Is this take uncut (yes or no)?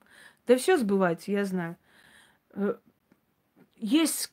yes